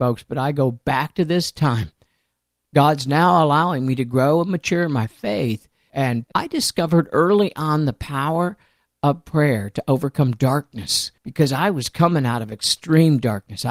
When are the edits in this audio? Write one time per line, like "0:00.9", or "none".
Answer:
0:11.2